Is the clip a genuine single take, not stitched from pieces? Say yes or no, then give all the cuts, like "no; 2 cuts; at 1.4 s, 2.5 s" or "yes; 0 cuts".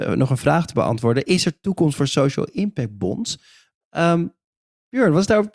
yes; 0 cuts